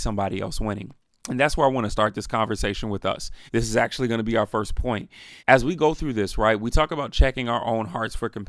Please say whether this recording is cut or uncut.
cut